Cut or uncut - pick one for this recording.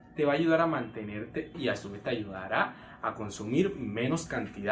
cut